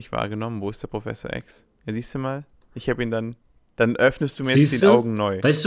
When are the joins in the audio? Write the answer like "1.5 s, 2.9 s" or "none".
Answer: none